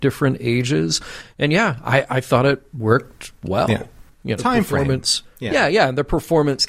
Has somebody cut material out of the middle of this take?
yes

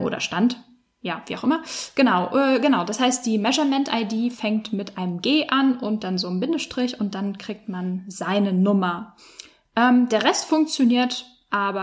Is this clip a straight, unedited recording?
yes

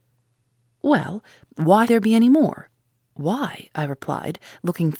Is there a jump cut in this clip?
yes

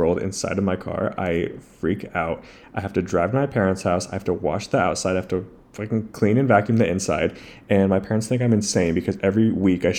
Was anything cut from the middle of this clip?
no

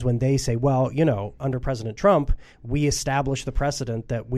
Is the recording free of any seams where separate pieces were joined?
yes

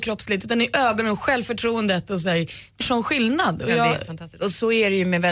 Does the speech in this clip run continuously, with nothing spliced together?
no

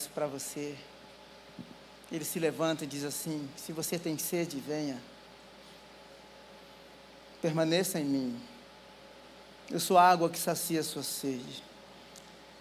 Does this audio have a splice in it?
no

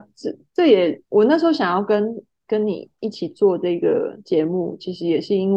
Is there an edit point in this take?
yes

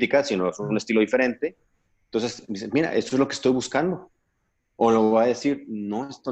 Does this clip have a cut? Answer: no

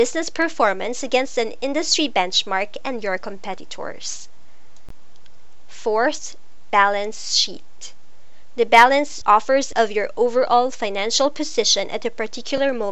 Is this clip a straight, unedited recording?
no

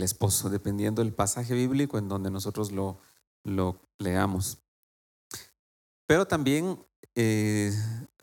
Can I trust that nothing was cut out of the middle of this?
yes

